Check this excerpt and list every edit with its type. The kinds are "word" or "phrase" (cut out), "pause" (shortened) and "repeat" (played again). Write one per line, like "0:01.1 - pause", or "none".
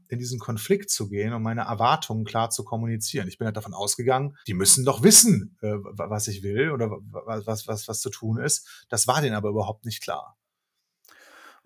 0:04.4 - pause